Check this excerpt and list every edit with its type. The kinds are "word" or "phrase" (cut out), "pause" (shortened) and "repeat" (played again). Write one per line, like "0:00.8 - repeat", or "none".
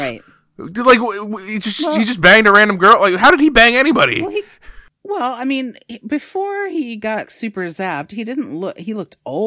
0:04.9 - pause
0:07.3 - word